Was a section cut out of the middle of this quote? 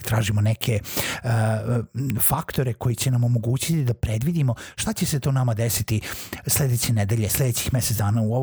no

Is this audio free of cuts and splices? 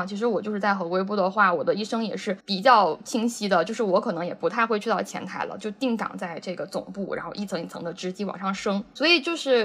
no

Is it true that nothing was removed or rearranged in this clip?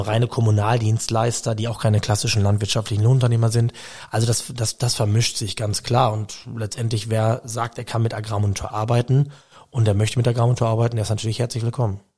yes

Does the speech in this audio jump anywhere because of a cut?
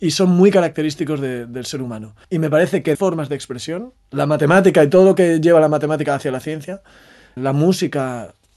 yes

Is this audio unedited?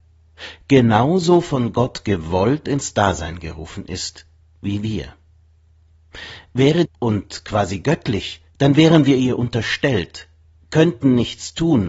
no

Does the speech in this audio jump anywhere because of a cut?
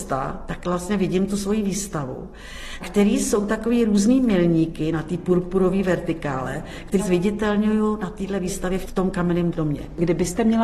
yes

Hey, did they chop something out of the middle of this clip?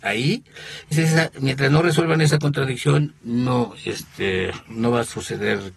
yes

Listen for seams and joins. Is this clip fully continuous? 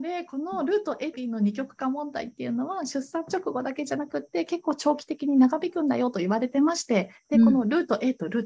no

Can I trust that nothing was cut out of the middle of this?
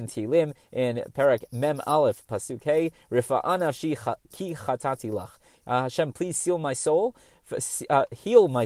yes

